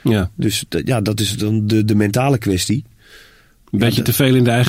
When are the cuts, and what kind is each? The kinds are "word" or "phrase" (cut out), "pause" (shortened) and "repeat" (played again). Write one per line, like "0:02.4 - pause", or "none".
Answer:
none